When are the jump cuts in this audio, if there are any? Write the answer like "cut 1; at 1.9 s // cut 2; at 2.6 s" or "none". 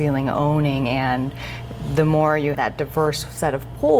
cut 1; at 2.5 s